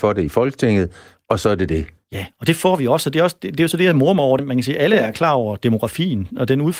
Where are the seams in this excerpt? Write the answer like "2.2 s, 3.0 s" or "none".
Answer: 4.4 s